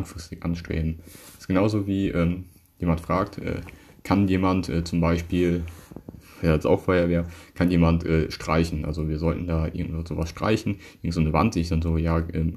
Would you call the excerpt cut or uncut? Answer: uncut